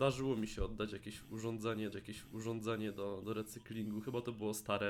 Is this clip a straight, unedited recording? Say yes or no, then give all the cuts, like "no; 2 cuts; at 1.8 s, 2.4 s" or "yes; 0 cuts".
no; 1 cut; at 1.9 s